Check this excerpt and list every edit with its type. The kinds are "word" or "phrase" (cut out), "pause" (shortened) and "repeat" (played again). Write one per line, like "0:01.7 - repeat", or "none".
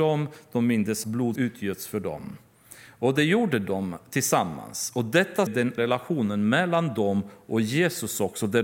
0:01.0 - word
0:01.4 - word
0:05.5 - word
0:05.8 - word